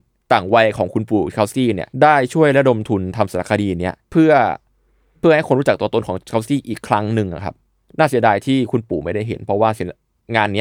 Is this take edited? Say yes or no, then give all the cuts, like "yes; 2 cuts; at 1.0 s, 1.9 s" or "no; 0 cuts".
yes; 2 cuts; at 1.9 s, 4.0 s